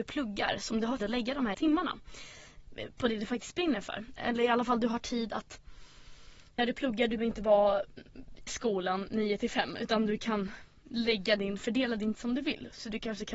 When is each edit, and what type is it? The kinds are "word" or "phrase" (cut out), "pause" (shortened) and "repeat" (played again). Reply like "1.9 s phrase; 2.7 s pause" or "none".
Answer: 1.0 s word; 1.5 s word; 6.6 s word; 7.2 s word; 8.5 s word; 12.1 s word

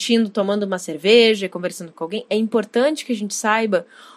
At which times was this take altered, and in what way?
none

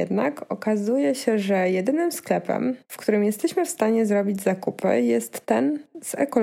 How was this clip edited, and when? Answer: 2.8 s pause

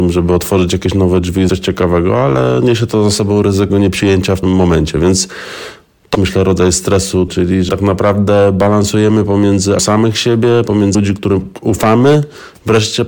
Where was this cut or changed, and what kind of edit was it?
1.5 s word; 3.7 s word; 4.4 s word; 6.1 s word; 7.3 s word; 7.7 s word; 9.8 s word; 10.9 s word

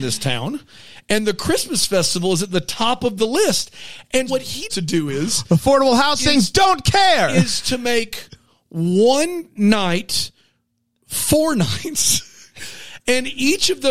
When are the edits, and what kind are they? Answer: 4.3 s word; 4.7 s word

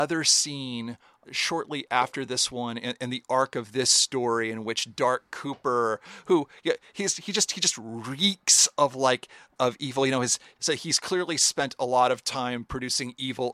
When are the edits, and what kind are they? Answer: none

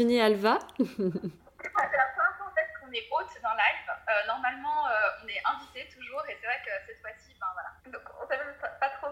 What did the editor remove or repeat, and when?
7.8 s pause

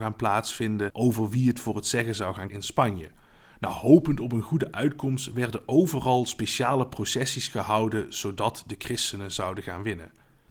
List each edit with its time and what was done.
2.5 s word

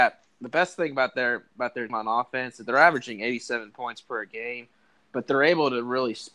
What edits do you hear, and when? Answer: 1.9 s word

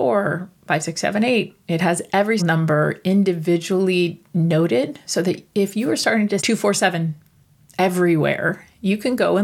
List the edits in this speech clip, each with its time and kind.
2.4 s word; 6.4 s word

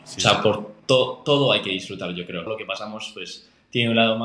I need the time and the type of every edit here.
2.5 s phrase

